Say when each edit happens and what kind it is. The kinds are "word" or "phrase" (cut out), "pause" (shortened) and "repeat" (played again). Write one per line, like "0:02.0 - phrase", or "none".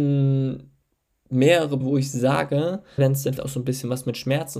0:01.8 - word
0:03.0 - word
0:03.4 - word